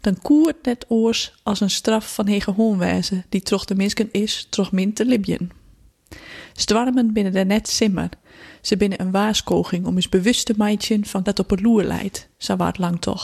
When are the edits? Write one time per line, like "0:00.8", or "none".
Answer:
0:04.1
0:11.3